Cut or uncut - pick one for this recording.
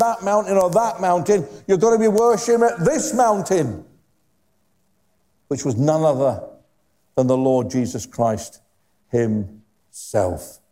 uncut